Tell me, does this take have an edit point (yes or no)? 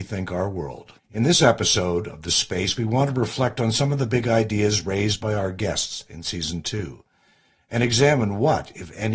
yes